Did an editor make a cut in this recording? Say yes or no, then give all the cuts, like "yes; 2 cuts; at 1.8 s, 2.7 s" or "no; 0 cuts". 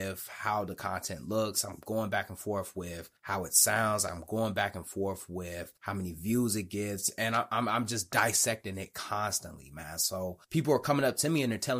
yes; 3 cuts; at 3.2 s, 5.8 s, 10.4 s